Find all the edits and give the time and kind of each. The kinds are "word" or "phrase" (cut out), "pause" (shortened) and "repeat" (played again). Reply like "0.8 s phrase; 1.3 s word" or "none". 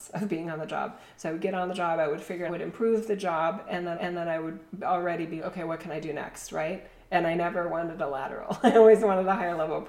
2.5 s phrase; 3.9 s repeat; 5.4 s word